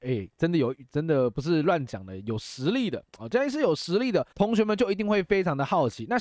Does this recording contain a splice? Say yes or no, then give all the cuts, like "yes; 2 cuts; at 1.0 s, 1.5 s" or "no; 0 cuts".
yes; 1 cut; at 4.3 s